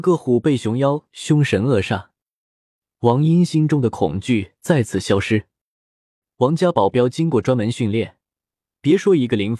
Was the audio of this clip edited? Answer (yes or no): no